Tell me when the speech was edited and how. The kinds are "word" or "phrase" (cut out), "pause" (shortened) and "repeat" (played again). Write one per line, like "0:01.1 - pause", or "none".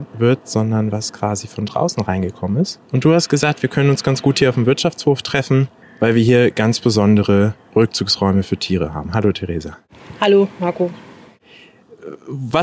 0:02.8 - pause
0:05.8 - pause